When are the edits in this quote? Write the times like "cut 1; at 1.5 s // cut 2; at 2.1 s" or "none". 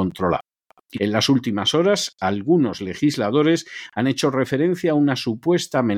cut 1; at 0.9 s